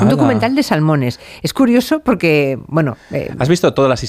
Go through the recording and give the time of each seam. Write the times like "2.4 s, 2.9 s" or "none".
none